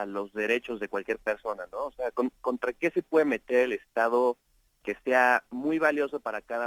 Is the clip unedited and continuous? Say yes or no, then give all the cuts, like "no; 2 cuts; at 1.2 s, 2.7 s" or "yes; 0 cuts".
yes; 0 cuts